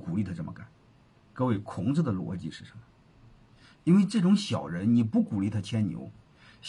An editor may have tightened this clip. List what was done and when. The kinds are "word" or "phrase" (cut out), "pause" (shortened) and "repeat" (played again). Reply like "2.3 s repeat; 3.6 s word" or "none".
none

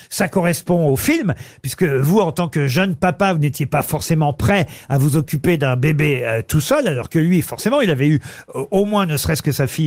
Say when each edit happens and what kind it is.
none

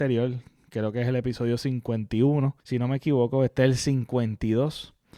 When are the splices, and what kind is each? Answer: 2.6 s pause

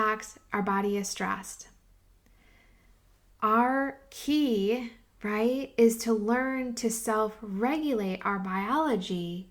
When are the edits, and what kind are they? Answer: none

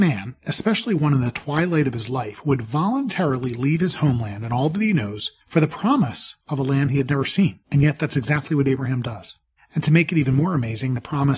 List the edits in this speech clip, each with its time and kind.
5.4 s pause; 6.4 s pause; 7.6 s pause; 9.6 s pause

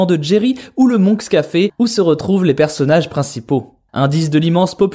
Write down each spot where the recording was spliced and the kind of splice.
none

